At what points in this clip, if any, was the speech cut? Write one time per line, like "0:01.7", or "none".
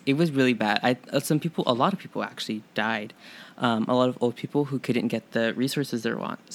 none